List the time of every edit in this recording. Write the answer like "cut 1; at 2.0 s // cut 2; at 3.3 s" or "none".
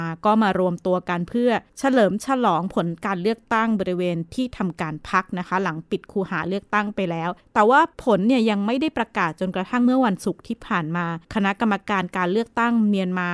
cut 1; at 1.7 s // cut 2; at 7.4 s // cut 3; at 7.9 s // cut 4; at 11.2 s